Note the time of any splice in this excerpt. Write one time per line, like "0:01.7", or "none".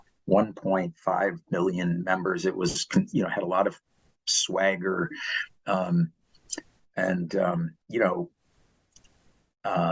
0:07.8